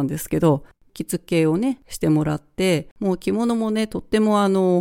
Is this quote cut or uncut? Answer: cut